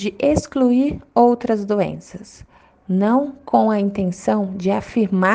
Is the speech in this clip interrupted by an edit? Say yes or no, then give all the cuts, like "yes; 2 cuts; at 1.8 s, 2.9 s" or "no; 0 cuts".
no; 0 cuts